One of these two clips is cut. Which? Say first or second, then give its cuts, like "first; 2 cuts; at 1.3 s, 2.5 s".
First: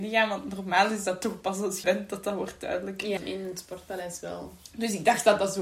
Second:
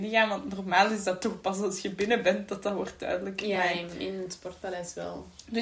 first; 2 cuts; at 1.8 s, 3.2 s